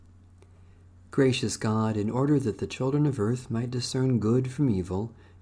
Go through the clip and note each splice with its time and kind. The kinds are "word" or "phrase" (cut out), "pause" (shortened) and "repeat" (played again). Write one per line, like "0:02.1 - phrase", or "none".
none